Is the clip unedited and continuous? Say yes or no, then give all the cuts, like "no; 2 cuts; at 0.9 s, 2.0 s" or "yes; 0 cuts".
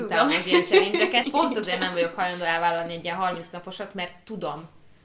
no; 1 cut; at 1.2 s